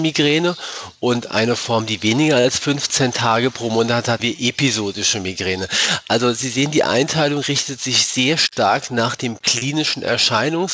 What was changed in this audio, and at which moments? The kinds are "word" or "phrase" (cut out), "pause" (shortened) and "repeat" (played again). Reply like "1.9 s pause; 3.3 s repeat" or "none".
4.2 s word